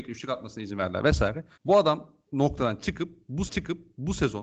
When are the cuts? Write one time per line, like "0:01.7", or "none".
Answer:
0:01.5
0:02.3
0:03.5